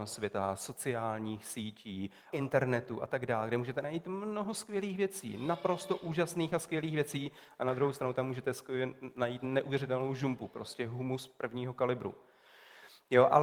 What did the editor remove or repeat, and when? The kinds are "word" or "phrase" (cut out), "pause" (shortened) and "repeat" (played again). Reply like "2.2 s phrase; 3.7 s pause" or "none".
2.3 s word

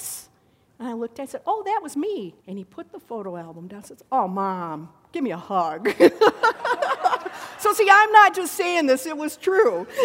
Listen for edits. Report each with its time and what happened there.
2.4 s pause

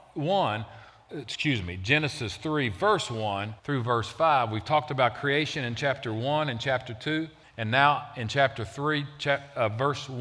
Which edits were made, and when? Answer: 1.1 s word; 3.6 s pause; 7.4 s pause

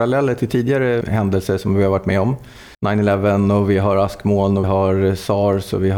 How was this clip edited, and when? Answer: 1.0 s word; 2.7 s pause; 4.6 s word

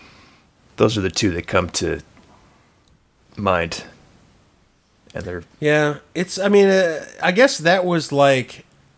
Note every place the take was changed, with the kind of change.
none

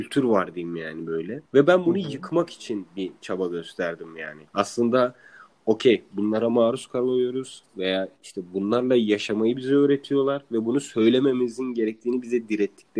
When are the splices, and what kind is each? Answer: 1.5 s pause; 4.5 s pause

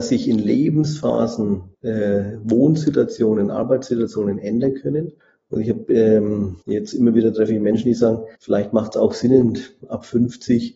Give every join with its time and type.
1.7 s pause; 5.2 s pause; 6.6 s pause; 8.4 s pause

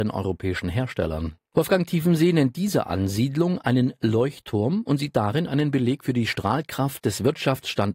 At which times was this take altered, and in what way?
1.4 s pause

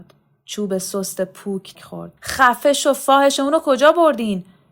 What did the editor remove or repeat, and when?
1.8 s word; 2.2 s pause

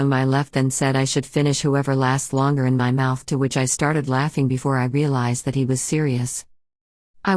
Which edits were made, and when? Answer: none

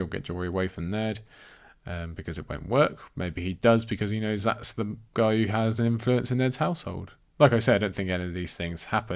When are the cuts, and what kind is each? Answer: none

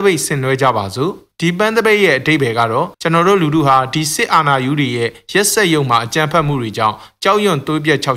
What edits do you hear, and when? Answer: 2.9 s pause

